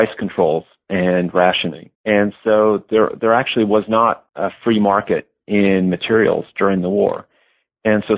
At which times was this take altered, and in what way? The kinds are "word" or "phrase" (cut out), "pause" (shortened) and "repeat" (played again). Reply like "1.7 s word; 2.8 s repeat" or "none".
1.9 s pause; 4.3 s pause